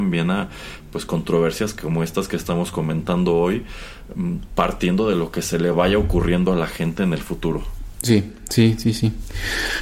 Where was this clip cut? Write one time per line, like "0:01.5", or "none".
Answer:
none